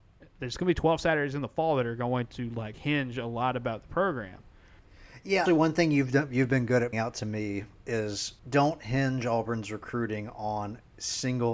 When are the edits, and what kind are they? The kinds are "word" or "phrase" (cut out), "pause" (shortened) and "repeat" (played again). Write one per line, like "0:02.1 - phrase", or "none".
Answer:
0:02.7 - word
0:05.5 - word
0:06.9 - word
0:08.4 - pause